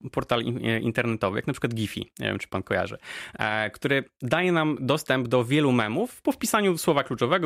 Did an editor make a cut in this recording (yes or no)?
no